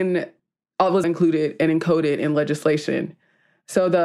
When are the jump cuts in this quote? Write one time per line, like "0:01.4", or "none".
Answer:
0:01.0